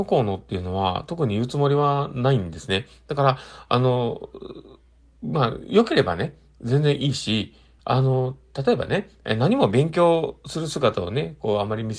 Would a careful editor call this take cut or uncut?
cut